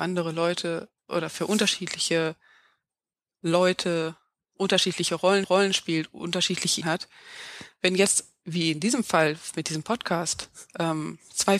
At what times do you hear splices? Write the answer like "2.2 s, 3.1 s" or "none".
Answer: 1.0 s, 5.4 s, 6.8 s, 10.7 s